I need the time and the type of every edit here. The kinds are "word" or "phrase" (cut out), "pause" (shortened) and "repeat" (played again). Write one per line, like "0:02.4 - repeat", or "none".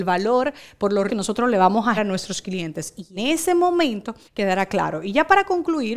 0:01.1 - word
0:02.0 - word
0:03.2 - word
0:04.2 - pause